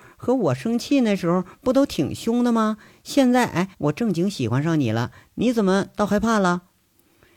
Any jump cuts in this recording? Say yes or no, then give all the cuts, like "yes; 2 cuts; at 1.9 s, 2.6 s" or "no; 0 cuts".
yes; 1 cut; at 3.7 s